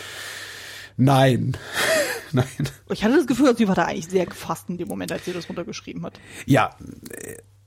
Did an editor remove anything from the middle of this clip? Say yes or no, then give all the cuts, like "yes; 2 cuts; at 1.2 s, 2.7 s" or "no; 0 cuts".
no; 0 cuts